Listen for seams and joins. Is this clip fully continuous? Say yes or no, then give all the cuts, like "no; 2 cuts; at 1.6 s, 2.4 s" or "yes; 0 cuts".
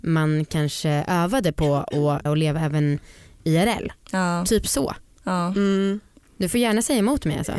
no; 1 cut; at 2.3 s